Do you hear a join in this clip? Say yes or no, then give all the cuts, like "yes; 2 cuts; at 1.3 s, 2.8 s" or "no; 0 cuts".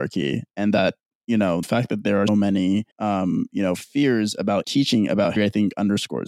yes; 5 cuts; at 1.6 s, 2.3 s, 2.9 s, 4.6 s, 5.4 s